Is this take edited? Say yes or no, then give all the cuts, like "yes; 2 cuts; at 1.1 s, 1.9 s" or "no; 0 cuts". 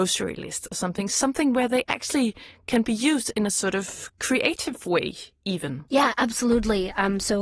yes; 1 cut; at 5.9 s